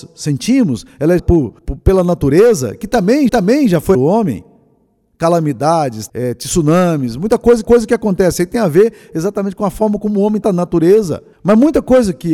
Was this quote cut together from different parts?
yes; 8 cuts; at 1.2 s, 1.6 s, 3.3 s, 3.9 s, 6.1 s, 7.6 s, 10.4 s, 11.3 s

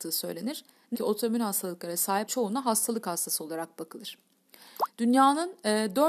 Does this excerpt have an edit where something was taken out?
yes; 2 cuts; at 0.9 s, 2.3 s

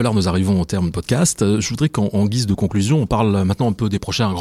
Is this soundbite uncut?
no; 1 cut; at 0.9 s

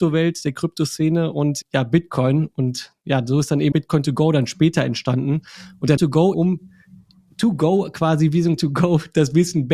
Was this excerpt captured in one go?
no; 5 cuts; at 1.6 s, 3.7 s, 6.0 s, 6.3 s, 8.6 s

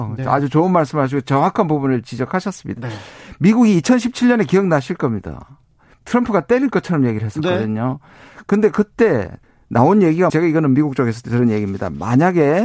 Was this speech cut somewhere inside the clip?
yes; 2 cuts; at 9.4 s, 10.3 s

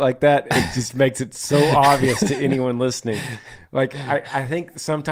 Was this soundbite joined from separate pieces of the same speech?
no; 0 cuts

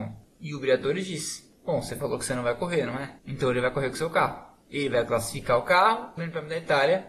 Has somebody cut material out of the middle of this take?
yes; 2 cuts; at 3.2 s, 6.2 s

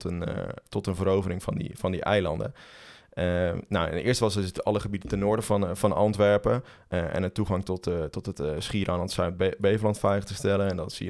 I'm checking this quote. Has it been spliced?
no; 0 cuts

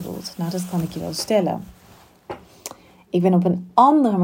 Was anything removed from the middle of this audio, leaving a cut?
no; 0 cuts

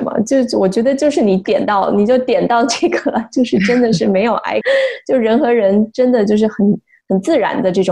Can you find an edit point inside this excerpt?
yes; 1 cut; at 4.6 s

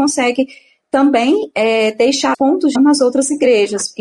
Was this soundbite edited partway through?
yes; 2 cuts; at 2.3 s, 2.8 s

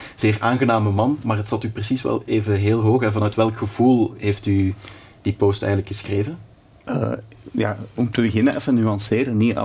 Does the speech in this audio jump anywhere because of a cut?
no; 0 cuts

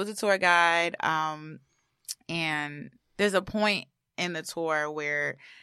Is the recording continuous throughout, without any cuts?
yes; 0 cuts

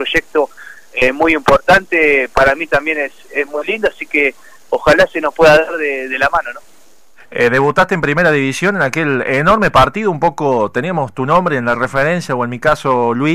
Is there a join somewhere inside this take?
no; 0 cuts

